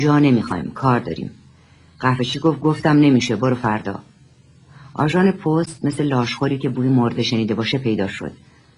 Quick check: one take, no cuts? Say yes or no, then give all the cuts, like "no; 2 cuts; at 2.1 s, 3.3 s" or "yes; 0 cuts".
yes; 0 cuts